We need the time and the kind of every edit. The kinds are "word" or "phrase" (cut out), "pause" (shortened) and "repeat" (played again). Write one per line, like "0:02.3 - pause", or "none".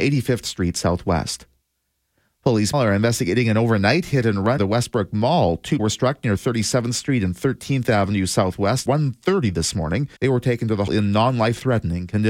0:02.7 - word
0:04.6 - word
0:05.8 - word
0:08.9 - phrase
0:10.2 - pause
0:10.9 - word